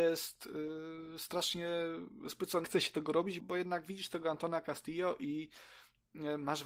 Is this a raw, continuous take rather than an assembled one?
no; 2 cuts; at 2.6 s, 3.4 s

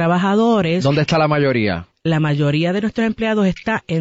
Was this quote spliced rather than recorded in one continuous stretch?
no; 0 cuts

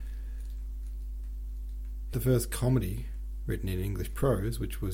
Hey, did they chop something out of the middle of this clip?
yes; 1 cut; at 2.1 s

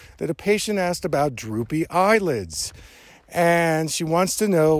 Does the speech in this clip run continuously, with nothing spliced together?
yes; 0 cuts

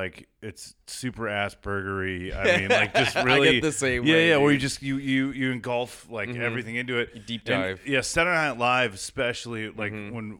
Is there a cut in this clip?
no; 0 cuts

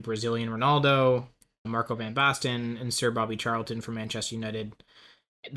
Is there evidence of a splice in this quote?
yes; 1 cut; at 1.6 s

